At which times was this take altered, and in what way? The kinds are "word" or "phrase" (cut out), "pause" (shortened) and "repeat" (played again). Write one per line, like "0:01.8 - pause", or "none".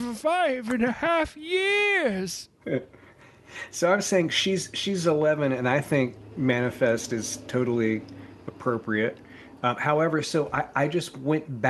none